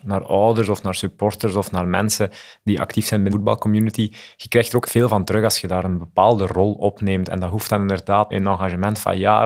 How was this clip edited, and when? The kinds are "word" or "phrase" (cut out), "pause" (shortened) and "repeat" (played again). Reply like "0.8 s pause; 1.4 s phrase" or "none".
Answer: 3.3 s word; 4.9 s word; 8.3 s word